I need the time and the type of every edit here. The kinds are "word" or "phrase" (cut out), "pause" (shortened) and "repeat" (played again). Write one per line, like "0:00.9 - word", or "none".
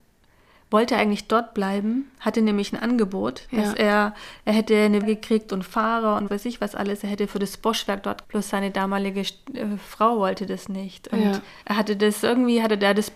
0:05.0 - word
0:06.3 - word
0:08.2 - word
0:11.6 - pause